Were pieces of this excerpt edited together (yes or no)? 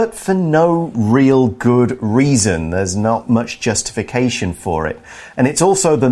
no